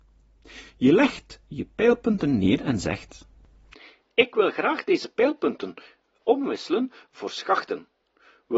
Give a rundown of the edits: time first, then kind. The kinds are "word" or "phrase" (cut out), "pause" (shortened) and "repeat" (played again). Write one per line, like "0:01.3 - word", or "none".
none

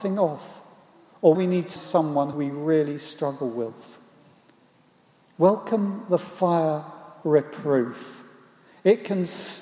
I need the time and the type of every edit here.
0:01.3 - word
0:01.8 - word
0:02.3 - word
0:07.2 - word

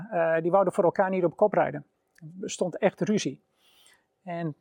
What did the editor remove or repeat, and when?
none

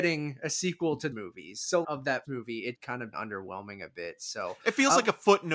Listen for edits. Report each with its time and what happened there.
0:01.1 - word
0:01.8 - phrase
0:02.2 - word
0:02.7 - phrase
0:03.1 - word

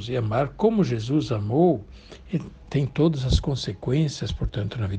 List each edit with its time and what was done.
none

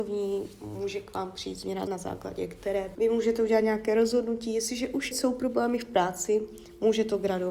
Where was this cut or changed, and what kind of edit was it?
0:01.9 - word
0:02.9 - word
0:05.1 - word

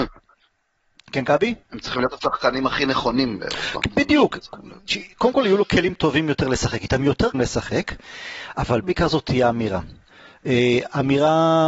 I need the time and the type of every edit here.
0:01.6 - pause
0:07.3 - word
0:08.8 - word

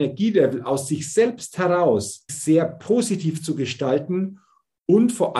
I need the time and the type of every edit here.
0:02.3 - word

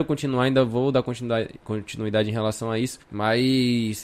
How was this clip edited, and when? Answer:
0:03.0 - pause

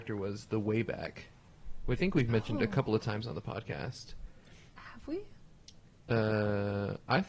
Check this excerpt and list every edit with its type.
0:02.0 - word

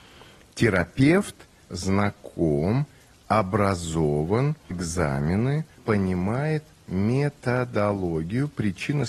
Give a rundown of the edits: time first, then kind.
0:01.6 - word
0:04.7 - word
0:05.8 - word

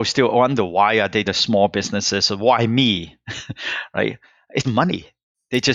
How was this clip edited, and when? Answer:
0:01.2 - word
0:04.6 - word

